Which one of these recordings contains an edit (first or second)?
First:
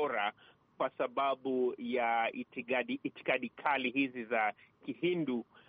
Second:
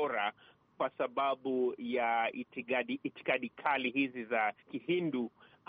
second